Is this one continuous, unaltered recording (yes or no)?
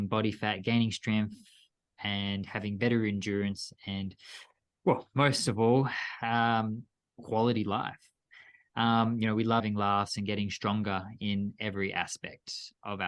yes